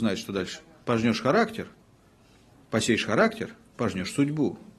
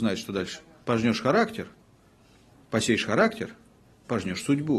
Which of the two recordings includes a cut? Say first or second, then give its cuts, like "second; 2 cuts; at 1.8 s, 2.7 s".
first; 1 cut; at 3.7 s